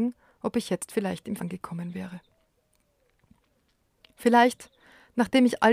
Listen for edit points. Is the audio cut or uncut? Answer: cut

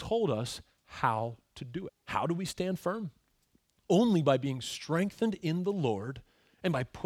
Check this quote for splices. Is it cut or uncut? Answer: cut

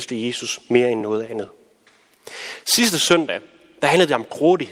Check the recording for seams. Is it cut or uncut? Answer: uncut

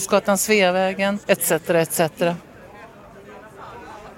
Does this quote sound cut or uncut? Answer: cut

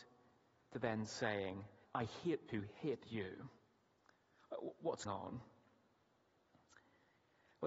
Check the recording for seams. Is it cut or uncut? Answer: cut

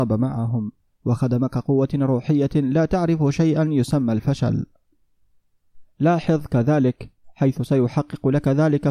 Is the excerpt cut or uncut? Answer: uncut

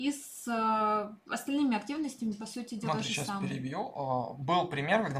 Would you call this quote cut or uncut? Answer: cut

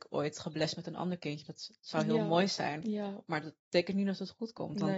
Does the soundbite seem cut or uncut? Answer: uncut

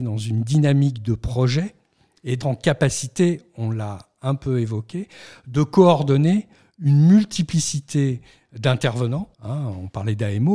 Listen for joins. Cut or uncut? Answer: cut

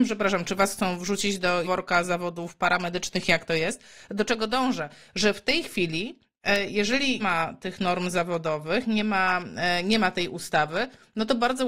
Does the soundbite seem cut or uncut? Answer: cut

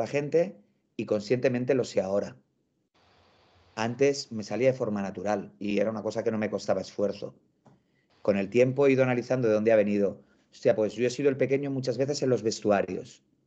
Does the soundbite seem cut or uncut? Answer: uncut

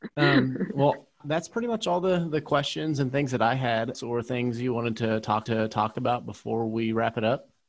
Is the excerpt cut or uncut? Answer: cut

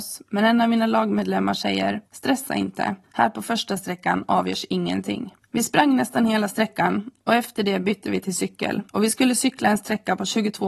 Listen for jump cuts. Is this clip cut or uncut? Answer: cut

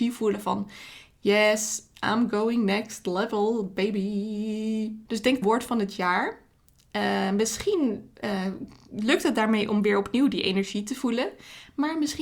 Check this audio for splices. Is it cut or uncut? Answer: cut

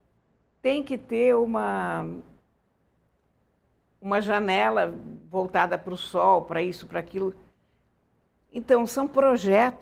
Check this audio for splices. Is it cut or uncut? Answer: uncut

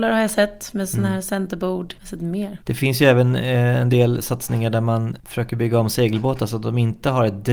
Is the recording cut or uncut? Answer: uncut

